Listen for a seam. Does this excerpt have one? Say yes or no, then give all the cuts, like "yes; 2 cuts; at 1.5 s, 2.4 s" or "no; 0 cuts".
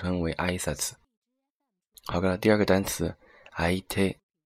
no; 0 cuts